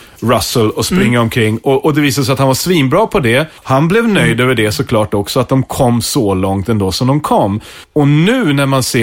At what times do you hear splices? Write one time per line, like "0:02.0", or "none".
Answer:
0:03.6
0:07.8